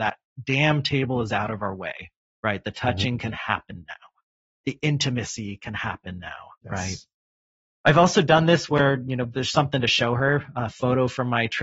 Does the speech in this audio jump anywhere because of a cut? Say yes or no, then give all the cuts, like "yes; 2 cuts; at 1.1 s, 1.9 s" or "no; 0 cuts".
yes; 1 cut; at 6.5 s